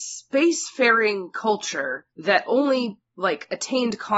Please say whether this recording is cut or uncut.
cut